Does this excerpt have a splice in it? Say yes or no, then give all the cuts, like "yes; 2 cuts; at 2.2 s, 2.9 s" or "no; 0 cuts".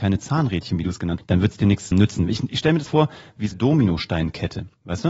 yes; 4 cuts; at 1.2 s, 1.9 s, 2.9 s, 3.5 s